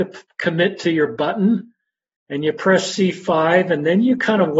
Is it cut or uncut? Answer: uncut